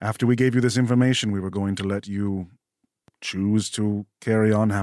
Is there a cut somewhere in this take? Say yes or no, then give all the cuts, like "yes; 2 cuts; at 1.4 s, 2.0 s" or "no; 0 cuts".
no; 0 cuts